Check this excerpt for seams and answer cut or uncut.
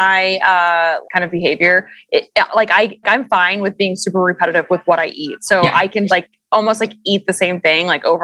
cut